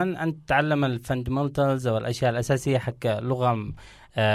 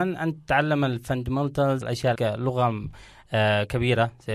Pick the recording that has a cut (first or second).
second